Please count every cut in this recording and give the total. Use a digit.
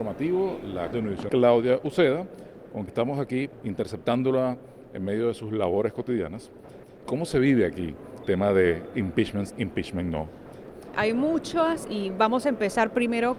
6